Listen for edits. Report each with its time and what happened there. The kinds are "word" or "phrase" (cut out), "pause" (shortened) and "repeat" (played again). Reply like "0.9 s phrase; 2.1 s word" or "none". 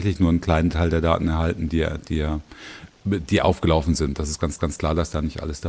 4.6 s repeat